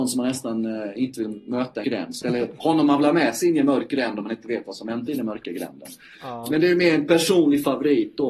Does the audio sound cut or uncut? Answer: cut